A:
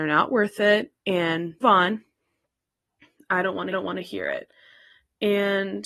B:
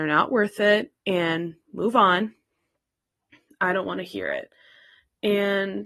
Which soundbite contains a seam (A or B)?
A